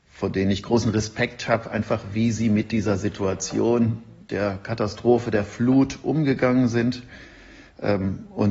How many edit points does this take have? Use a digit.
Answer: 0